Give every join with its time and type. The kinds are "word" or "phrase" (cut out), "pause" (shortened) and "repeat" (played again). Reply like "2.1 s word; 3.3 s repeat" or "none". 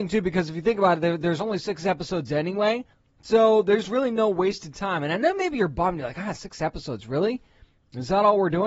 2.9 s pause